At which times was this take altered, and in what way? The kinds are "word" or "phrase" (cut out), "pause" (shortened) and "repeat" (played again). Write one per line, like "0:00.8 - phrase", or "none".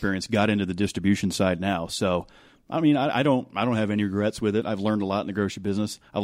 none

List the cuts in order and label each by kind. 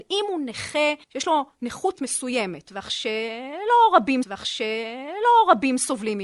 0:01.0 - pause
0:02.0 - word
0:04.2 - repeat

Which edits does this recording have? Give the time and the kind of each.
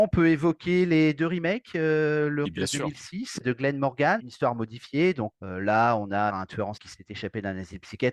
0:02.5 - word
0:03.4 - word
0:04.2 - word
0:05.3 - word
0:06.3 - word
0:06.8 - word

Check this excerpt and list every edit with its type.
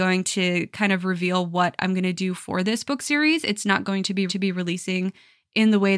0:04.3 - repeat

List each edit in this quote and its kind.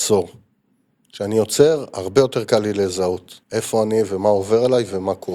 0:03.4 - pause

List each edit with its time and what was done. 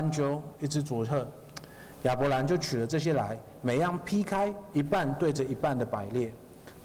0:04.7 - phrase

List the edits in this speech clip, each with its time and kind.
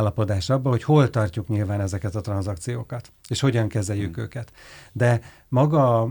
none

